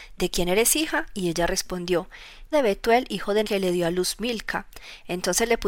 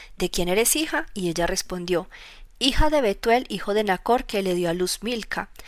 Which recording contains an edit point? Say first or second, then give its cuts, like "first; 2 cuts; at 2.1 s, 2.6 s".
first; 2 cuts; at 2.5 s, 3.4 s